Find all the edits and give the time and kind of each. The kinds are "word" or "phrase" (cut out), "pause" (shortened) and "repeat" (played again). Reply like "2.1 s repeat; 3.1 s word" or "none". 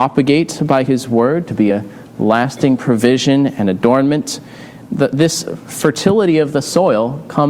none